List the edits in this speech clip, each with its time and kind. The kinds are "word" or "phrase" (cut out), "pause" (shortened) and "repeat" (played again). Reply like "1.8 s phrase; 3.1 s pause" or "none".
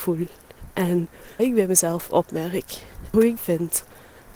1.4 s word; 3.4 s word